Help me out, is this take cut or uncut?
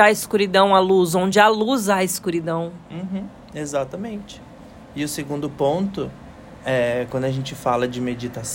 uncut